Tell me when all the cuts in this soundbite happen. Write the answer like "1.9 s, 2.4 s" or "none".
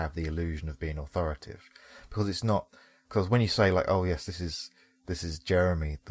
none